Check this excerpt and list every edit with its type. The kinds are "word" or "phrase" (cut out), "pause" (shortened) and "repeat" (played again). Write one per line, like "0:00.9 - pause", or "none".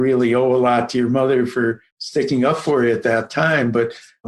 0:01.9 - pause